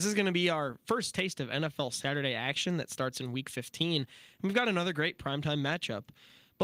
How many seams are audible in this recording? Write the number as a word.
zero